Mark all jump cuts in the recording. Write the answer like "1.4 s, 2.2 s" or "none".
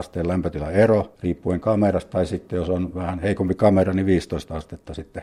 1.2 s